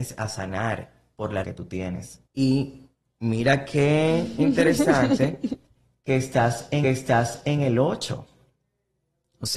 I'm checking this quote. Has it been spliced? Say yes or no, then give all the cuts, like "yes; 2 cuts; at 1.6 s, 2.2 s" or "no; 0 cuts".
yes; 3 cuts; at 1.4 s, 2.3 s, 6.8 s